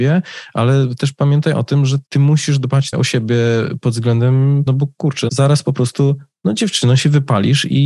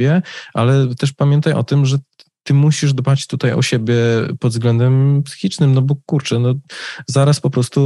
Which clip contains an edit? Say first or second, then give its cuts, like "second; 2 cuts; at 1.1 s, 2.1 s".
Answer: first; 4 cuts; at 2.1 s, 2.9 s, 4.7 s, 5.3 s